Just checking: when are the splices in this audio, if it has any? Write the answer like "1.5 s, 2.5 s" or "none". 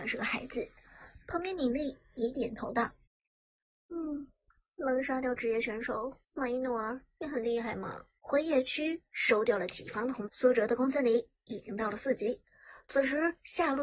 3.1 s, 6.2 s, 8.2 s, 10.3 s